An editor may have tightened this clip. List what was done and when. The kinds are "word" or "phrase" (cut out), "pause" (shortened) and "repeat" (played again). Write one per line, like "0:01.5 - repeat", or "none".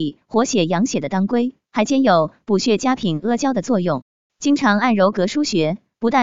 none